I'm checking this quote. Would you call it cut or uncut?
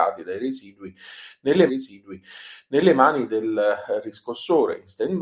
cut